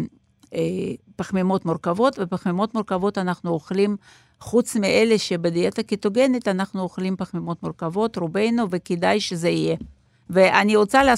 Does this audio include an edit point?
no; 0 cuts

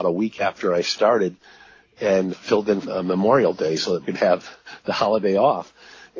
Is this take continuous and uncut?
no; 3 cuts; at 2.3 s, 2.8 s, 4.0 s

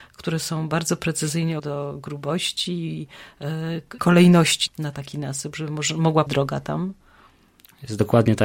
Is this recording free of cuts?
no; 4 cuts; at 1.6 s, 4.0 s, 4.7 s, 6.3 s

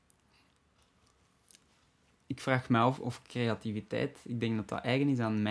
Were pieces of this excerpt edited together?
yes; 1 cut; at 3.0 s

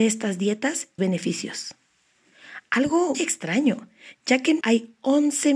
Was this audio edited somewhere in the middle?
yes; 3 cuts; at 1.0 s, 3.1 s, 4.6 s

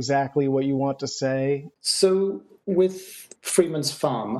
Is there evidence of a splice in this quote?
no; 0 cuts

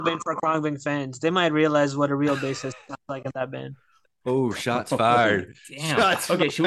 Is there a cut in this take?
no; 0 cuts

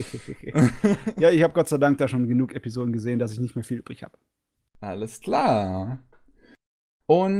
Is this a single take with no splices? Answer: yes; 0 cuts

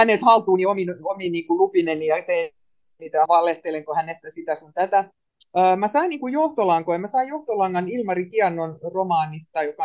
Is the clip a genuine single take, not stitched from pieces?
no; 1 cut; at 3.3 s

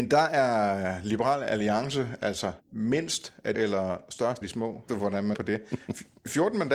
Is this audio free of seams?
no; 5 cuts; at 2.6 s, 3.5 s, 4.4 s, 4.9 s, 5.3 s

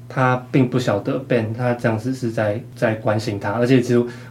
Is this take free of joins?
yes; 0 cuts

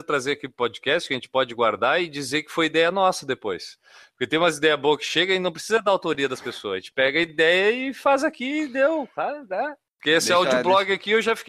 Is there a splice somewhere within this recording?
no; 0 cuts

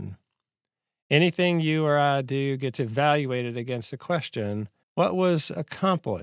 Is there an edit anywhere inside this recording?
yes; 1 cut; at 4.8 s

